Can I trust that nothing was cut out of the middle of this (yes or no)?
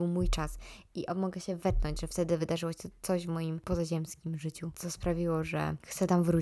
yes